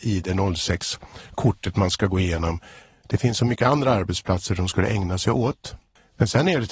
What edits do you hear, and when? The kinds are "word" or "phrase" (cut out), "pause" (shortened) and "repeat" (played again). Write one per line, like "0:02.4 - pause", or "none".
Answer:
none